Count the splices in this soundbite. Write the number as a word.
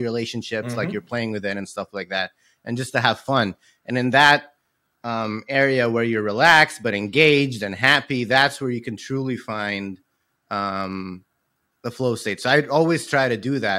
zero